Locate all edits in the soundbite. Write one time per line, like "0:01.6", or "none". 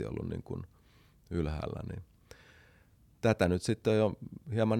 none